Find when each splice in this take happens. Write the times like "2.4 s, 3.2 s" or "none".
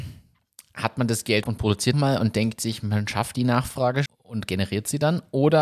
1.4 s, 1.9 s, 4.1 s